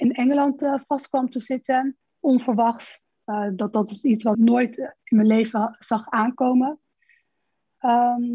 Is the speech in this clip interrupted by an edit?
yes; 2 cuts; at 2.0 s, 4.3 s

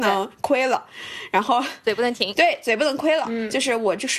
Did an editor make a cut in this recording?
no; 0 cuts

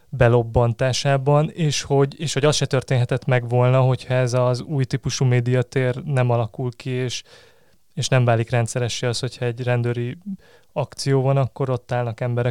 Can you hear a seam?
no; 0 cuts

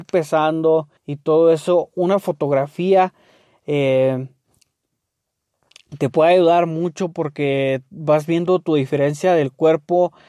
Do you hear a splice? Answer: yes; 1 cut; at 1.0 s

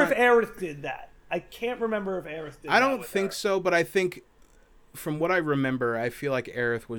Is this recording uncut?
yes; 0 cuts

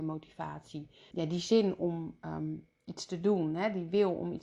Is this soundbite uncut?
no; 1 cut; at 1.1 s

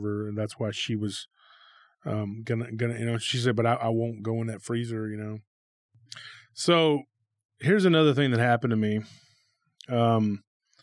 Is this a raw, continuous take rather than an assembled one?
yes; 0 cuts

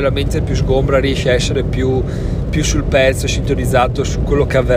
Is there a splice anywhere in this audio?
no; 0 cuts

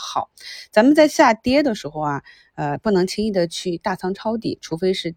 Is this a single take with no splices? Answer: yes; 0 cuts

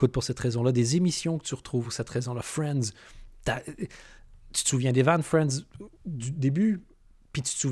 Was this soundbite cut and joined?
no; 0 cuts

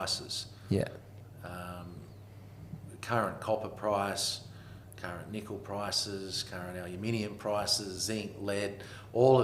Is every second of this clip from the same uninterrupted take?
yes; 0 cuts

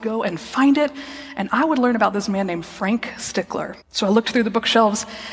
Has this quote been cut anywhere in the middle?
yes; 1 cut; at 3.8 s

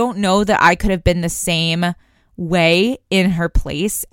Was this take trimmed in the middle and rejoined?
no; 0 cuts

